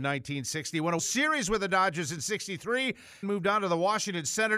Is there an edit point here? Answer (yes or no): yes